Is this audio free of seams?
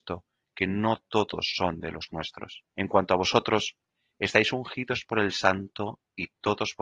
no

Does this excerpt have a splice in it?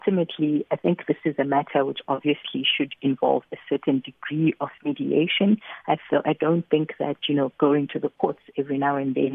no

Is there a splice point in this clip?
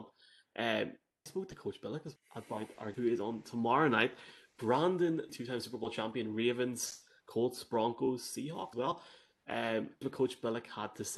yes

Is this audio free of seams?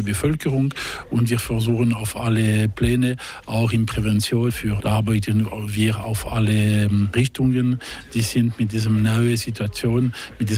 no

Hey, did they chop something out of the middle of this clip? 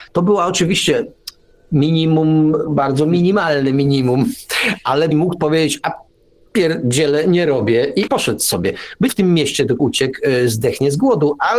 yes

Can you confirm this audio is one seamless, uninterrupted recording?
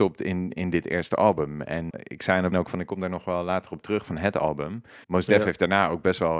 no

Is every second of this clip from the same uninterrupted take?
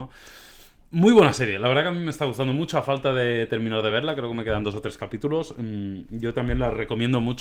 yes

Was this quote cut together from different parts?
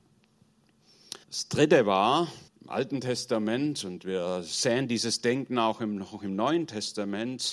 yes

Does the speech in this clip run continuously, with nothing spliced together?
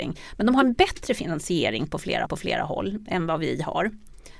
no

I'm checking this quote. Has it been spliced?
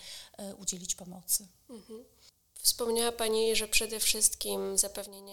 no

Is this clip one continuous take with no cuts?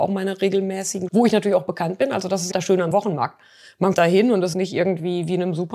no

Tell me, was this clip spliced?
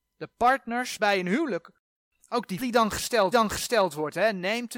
yes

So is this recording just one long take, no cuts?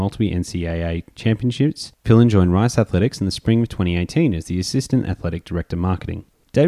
no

